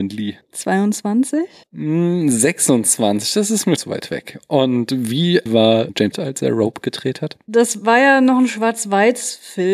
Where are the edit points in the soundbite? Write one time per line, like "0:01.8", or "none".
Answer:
0:03.8
0:05.5
0:06.1